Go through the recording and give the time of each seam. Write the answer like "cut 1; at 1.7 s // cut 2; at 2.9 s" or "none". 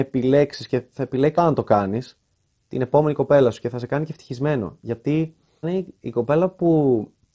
cut 1; at 1.4 s // cut 2; at 5.6 s